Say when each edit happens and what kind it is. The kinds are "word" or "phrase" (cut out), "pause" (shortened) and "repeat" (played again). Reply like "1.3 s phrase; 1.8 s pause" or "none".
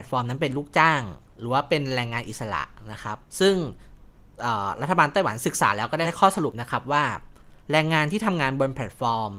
3.3 s pause; 7.6 s pause